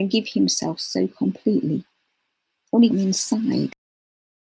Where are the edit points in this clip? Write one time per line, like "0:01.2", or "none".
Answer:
0:02.9